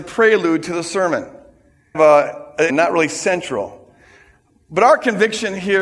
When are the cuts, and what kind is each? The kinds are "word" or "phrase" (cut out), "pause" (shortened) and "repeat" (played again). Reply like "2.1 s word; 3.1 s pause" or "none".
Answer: 1.9 s word; 2.7 s word